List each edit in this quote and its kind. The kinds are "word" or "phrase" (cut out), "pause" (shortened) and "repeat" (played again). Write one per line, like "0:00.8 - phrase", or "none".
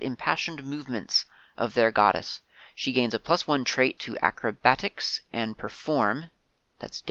0:04.0 - word